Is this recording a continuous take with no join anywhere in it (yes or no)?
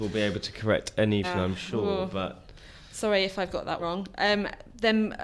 no